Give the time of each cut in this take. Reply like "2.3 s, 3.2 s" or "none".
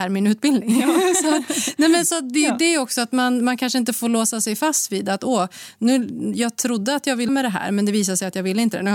7.3 s